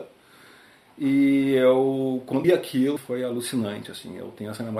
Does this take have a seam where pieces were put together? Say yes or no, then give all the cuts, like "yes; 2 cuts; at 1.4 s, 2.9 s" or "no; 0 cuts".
yes; 2 cuts; at 2.4 s, 3.0 s